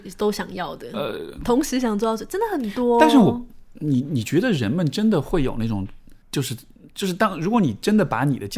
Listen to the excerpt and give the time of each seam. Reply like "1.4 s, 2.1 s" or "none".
6.2 s